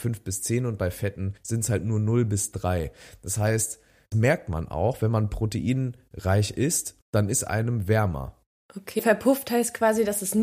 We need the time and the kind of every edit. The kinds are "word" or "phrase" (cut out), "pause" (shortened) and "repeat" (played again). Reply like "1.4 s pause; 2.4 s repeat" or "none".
1.4 s pause; 4.1 s word; 7.0 s pause; 9.0 s word